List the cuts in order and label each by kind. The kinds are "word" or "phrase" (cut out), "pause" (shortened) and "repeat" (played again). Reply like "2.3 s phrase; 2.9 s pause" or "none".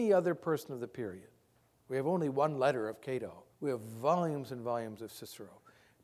3.5 s pause

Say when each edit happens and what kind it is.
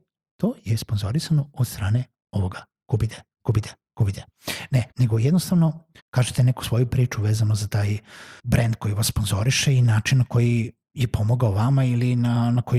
3.3 s pause; 4.9 s pause; 6.0 s pause; 8.4 s pause

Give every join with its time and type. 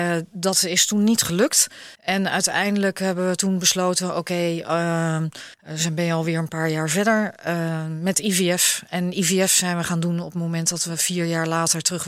1.9 s pause; 5.5 s pause

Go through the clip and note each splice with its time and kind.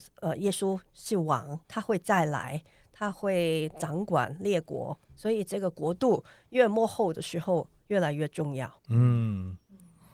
1.6 s pause; 8.8 s pause

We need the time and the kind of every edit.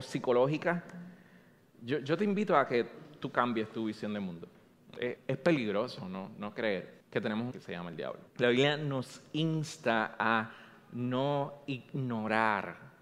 5.2 s word; 7.0 s pause; 7.5 s phrase; 8.3 s pause

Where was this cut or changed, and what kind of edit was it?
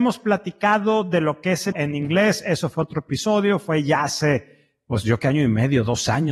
1.7 s word; 5.2 s word

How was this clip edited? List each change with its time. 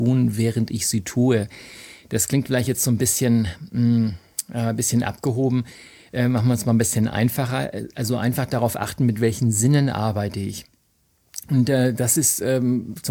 none

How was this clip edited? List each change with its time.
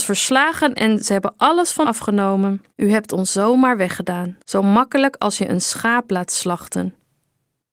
1.8 s word; 2.7 s pause; 4.4 s pause

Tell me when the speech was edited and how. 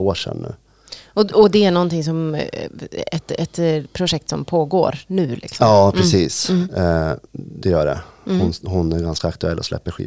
7.3 s pause

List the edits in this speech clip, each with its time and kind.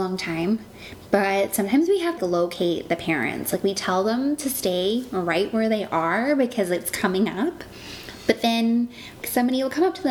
2.2 s word; 9.2 s word

